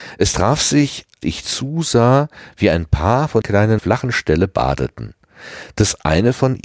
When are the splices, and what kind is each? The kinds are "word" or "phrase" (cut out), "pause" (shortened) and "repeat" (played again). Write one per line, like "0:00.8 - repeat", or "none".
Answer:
0:01.2 - word
0:03.4 - word
0:03.8 - phrase